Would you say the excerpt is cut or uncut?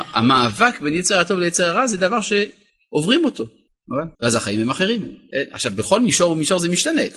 cut